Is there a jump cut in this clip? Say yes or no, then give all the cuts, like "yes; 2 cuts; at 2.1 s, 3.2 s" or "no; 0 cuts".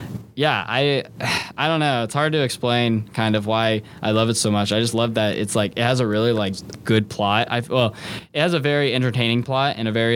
no; 0 cuts